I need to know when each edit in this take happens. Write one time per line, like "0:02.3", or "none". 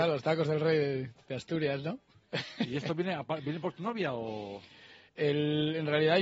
none